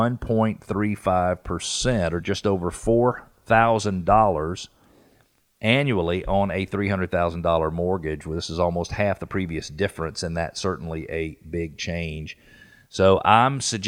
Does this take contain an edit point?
no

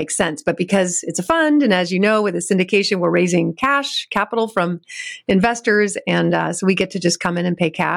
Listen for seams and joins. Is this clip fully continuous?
yes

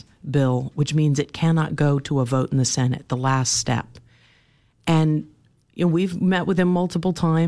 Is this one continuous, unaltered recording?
yes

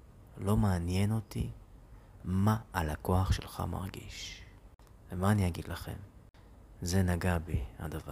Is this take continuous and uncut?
no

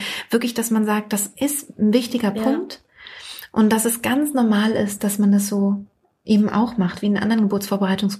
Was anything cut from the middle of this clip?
no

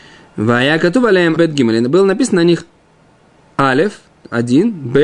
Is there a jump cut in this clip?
yes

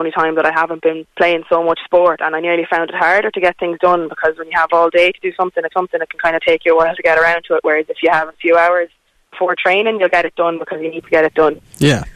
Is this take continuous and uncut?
no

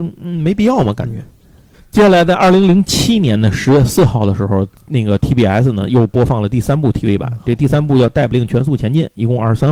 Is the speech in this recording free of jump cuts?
yes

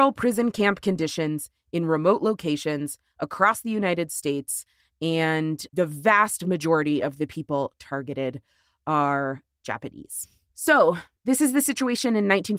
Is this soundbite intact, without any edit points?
yes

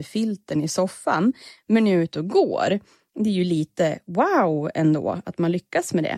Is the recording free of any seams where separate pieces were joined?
yes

